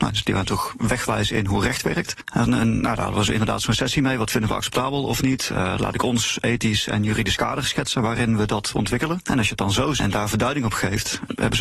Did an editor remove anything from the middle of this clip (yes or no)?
yes